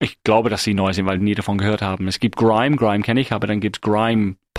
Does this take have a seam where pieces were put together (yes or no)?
no